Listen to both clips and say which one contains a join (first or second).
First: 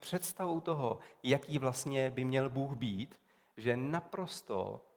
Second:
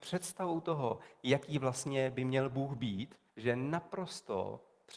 second